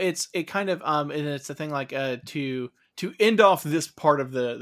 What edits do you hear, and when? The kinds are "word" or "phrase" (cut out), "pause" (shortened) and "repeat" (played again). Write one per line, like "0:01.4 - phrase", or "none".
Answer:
none